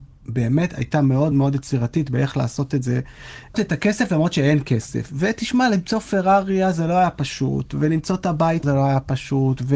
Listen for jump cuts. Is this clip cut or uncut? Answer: cut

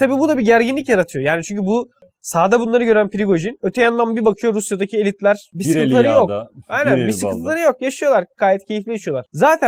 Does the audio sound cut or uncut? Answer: uncut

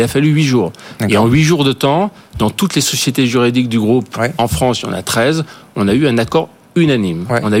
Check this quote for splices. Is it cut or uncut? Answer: uncut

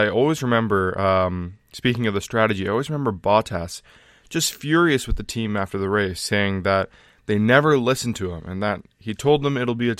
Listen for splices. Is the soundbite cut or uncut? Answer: uncut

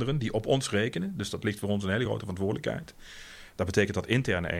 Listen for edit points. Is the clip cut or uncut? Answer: uncut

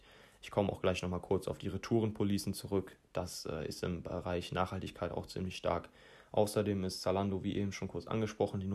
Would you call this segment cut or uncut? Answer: uncut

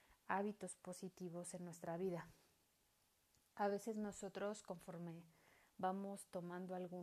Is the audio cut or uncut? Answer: uncut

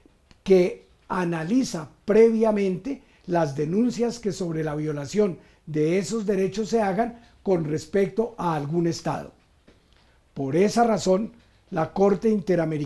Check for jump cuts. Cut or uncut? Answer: uncut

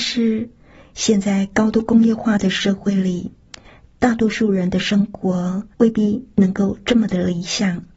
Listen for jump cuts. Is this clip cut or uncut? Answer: cut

